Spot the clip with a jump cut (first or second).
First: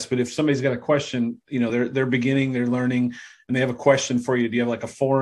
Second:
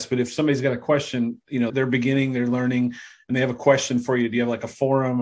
second